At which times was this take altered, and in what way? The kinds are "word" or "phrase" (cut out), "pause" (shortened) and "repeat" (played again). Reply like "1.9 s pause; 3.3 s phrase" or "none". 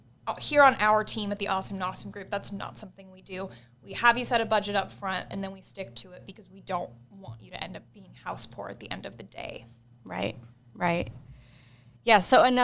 none

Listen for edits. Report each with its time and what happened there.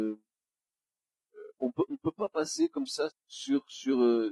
1.5 s word; 1.9 s word; 3.1 s word

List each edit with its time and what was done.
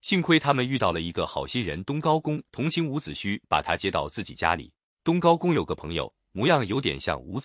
2.5 s pause; 3.4 s pause; 4.9 s pause

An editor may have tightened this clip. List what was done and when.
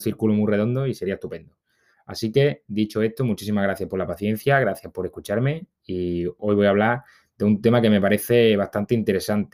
none

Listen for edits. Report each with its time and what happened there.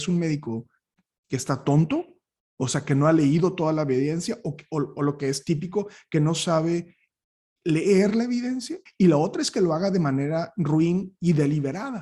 8.9 s pause

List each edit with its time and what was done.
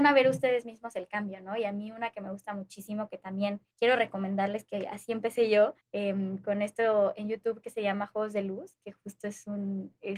3.7 s pause; 5.8 s pause

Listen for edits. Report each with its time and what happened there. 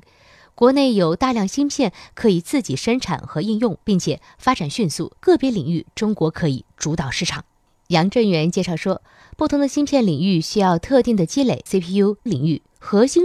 3.8 s pause; 5.2 s pause; 11.7 s word; 12.3 s word

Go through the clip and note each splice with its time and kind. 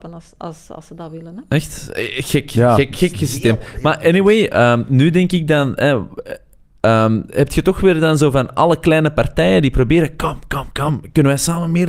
none

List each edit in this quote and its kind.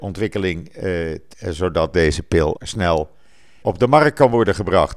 1.3 s word; 2.6 s word; 3.6 s word

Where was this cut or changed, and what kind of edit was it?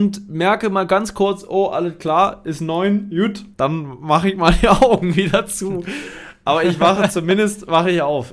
3.5 s pause

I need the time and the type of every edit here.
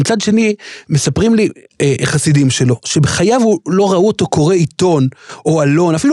none

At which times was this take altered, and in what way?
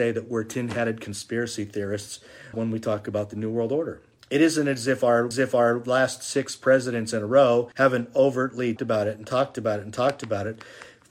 2.5 s word; 4.2 s pause; 5.3 s repeat; 7.7 s pause; 8.8 s word

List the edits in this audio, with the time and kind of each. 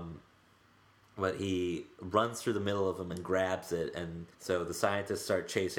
4.3 s pause

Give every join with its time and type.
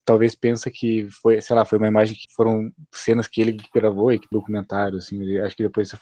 2.2 s word; 4.3 s word

